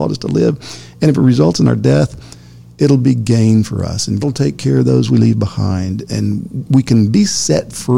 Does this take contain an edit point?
yes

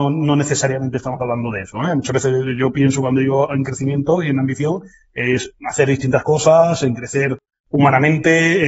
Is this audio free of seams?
yes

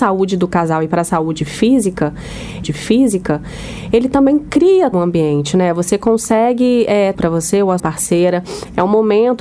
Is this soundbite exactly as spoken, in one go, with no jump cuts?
no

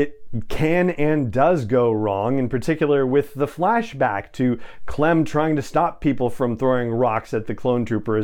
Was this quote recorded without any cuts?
yes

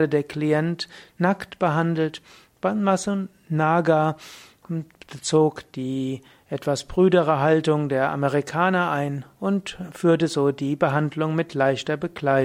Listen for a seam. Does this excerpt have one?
no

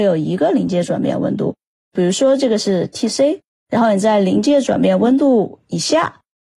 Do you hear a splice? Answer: no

